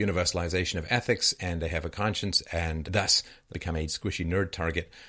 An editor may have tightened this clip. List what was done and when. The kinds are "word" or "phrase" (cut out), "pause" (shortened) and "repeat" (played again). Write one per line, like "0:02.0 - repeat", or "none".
0:02.8 - word
0:03.5 - phrase
0:03.9 - word